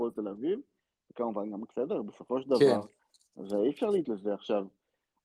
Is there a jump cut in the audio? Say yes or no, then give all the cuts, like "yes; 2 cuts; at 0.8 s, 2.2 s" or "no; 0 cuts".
yes; 2 cuts; at 1.7 s, 4.0 s